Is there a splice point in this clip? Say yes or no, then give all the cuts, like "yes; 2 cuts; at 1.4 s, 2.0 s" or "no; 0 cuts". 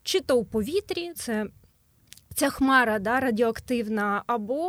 yes; 1 cut; at 1.1 s